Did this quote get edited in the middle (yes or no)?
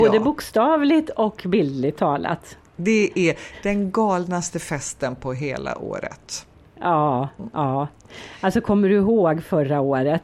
no